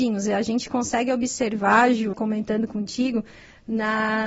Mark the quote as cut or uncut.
cut